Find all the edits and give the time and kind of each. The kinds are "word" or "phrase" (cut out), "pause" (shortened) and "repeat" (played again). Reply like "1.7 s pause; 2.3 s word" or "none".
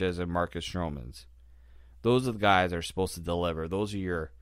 none